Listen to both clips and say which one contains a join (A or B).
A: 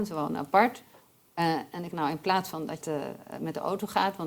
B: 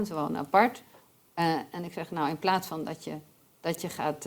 A